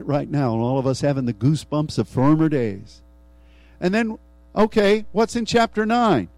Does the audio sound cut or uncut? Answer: uncut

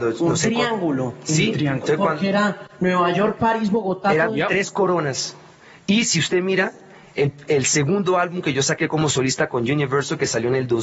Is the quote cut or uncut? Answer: uncut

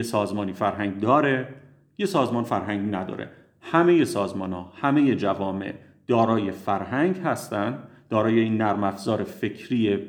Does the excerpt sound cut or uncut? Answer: uncut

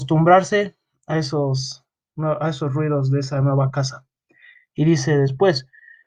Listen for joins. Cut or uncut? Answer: uncut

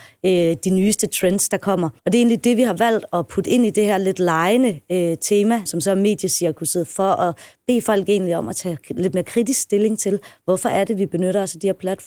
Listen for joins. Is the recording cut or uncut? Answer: cut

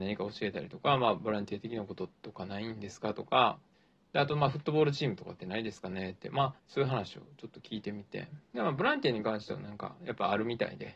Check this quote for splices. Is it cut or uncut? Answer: cut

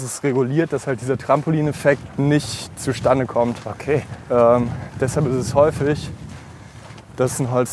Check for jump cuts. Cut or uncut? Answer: uncut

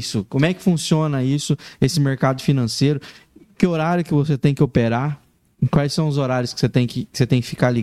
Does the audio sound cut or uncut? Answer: uncut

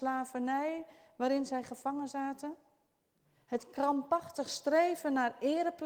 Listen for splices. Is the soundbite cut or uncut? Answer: uncut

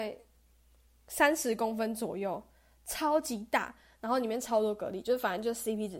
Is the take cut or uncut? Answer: uncut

